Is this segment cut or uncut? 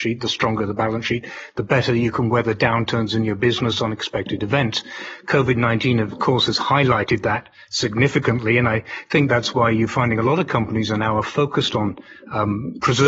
uncut